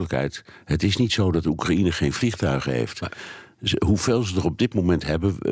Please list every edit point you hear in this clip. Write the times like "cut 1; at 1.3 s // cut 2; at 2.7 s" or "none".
none